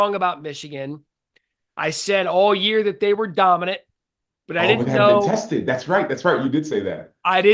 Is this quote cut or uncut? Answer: uncut